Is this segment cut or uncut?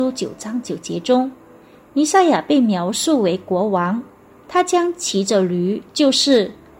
cut